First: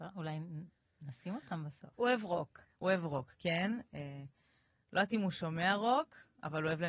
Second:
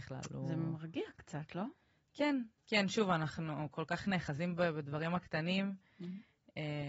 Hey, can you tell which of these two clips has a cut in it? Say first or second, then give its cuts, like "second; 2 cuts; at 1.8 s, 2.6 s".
second; 1 cut; at 2.6 s